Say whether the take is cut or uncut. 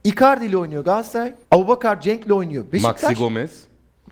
cut